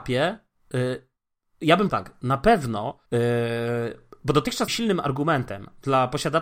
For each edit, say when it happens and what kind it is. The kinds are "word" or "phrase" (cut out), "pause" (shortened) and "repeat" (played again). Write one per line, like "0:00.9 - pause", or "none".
0:01.9 - word
0:03.1 - pause
0:04.7 - word